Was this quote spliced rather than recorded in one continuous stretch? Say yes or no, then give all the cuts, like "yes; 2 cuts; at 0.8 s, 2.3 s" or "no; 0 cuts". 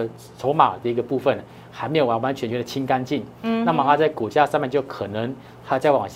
no; 0 cuts